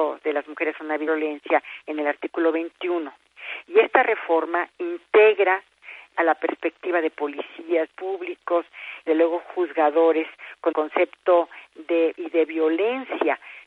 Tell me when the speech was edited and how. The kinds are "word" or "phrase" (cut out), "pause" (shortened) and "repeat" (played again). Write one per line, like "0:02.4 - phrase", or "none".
0:01.1 - word
0:06.1 - word
0:07.9 - word
0:09.1 - word
0:10.7 - word
0:12.1 - word